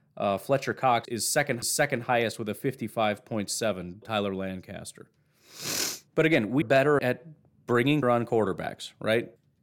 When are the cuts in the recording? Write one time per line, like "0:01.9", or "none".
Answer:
0:01.0
0:01.6
0:04.0
0:06.1
0:06.6
0:07.0
0:08.0